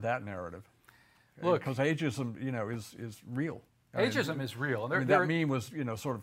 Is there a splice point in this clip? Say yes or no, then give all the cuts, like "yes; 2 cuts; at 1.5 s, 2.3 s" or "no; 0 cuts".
yes; 1 cut; at 3.7 s